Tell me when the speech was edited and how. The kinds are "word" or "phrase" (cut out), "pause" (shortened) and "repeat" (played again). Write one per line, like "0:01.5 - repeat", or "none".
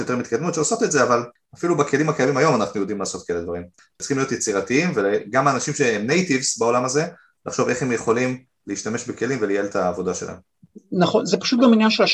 none